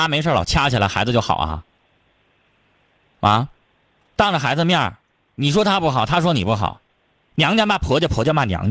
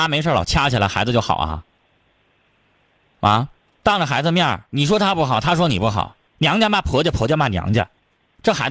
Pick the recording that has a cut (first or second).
second